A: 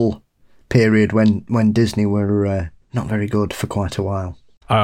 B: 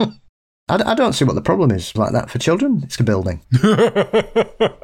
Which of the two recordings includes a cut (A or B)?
B